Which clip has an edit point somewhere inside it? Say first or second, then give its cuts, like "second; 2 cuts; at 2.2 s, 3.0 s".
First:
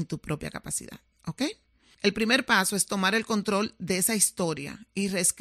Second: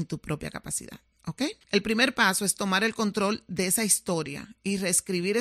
second; 1 cut; at 1.6 s